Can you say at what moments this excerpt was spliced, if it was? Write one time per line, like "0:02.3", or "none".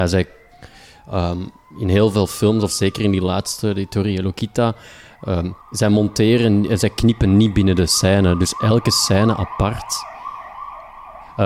0:05.6